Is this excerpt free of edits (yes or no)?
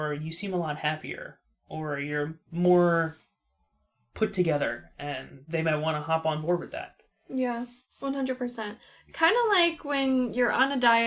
yes